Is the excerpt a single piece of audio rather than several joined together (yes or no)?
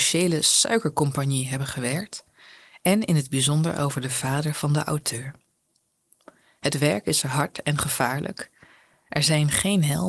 yes